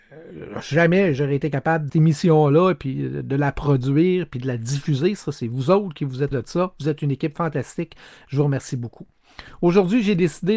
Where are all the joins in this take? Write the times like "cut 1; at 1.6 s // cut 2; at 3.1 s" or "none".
cut 1; at 1.9 s // cut 2; at 6.3 s